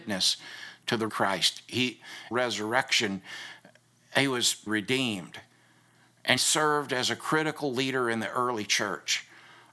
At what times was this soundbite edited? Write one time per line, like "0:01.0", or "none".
0:01.1
0:02.3
0:04.7
0:06.4